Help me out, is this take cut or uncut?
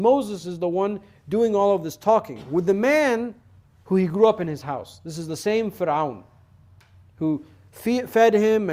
uncut